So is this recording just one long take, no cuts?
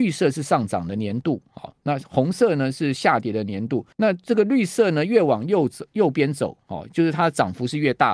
no; 1 cut; at 3.9 s

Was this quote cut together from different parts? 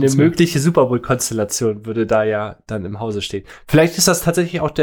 no; 0 cuts

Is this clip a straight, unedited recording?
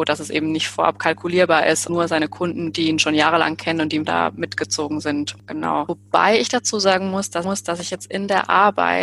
no; 3 cuts; at 1.9 s, 4.0 s, 7.4 s

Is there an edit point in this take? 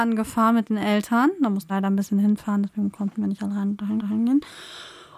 yes; 2 cuts; at 1.7 s, 4.0 s

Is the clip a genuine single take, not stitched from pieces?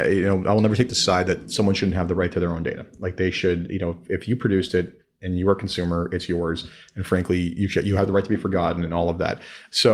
yes; 0 cuts

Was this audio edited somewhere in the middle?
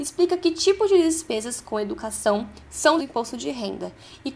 yes; 1 cut; at 3.0 s

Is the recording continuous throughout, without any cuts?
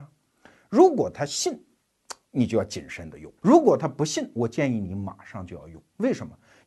no; 1 cut; at 3.4 s

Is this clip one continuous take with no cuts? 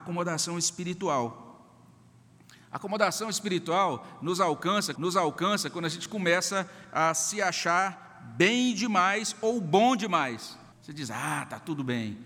no; 2 cuts; at 5.0 s, 10.7 s

